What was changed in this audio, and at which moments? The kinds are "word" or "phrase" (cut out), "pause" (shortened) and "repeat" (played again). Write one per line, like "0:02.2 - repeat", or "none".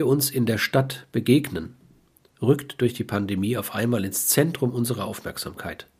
none